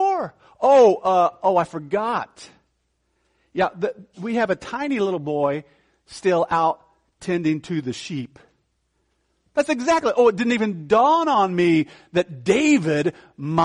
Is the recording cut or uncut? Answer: uncut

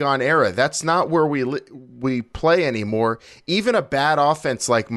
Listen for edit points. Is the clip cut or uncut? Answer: uncut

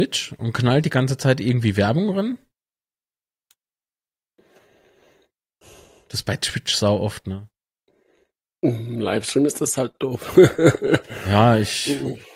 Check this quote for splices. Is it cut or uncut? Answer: uncut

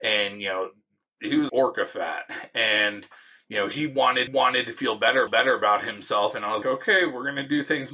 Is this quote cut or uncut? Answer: cut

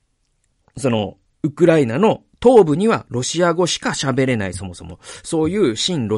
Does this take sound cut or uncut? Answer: cut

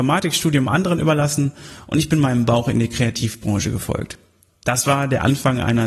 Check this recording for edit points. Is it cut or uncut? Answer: uncut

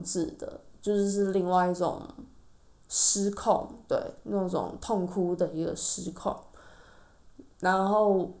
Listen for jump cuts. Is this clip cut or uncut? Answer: uncut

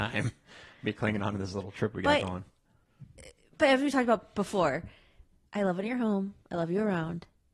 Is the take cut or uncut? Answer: cut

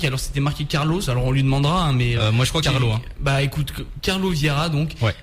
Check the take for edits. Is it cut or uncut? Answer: cut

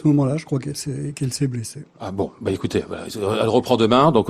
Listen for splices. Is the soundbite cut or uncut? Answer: uncut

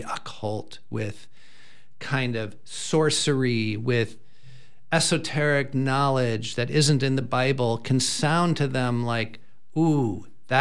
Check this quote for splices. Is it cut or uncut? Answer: uncut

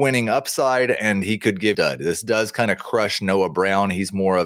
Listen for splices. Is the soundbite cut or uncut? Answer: cut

